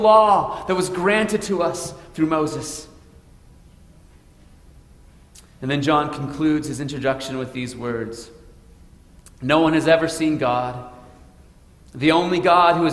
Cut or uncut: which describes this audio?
uncut